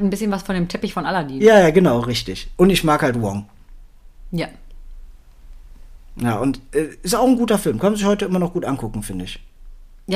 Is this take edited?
no; 0 cuts

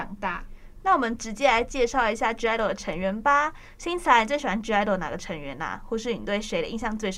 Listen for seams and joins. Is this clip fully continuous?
yes; 0 cuts

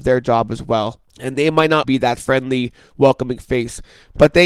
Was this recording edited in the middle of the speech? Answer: yes; 2 cuts; at 1.1 s, 1.8 s

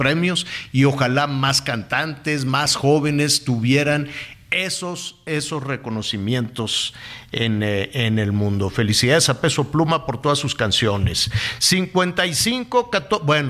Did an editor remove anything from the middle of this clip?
no; 0 cuts

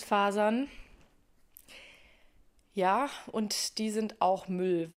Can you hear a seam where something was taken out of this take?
no; 0 cuts

